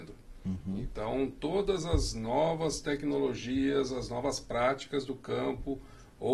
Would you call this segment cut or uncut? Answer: uncut